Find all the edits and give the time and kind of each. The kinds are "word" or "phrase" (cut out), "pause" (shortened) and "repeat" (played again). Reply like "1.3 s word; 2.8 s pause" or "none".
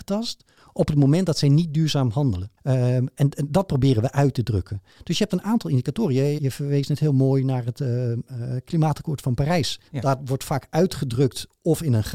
2.6 s pause; 6.4 s word; 9.9 s pause